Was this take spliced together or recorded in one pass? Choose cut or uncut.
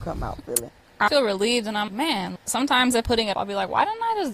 cut